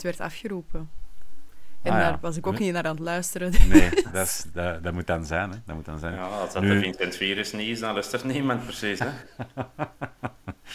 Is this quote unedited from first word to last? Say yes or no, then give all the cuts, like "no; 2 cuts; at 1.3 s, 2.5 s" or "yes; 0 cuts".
yes; 0 cuts